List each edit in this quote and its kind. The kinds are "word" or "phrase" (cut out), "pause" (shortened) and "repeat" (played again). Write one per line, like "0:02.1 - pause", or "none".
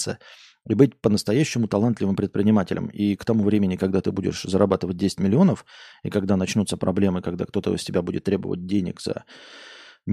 none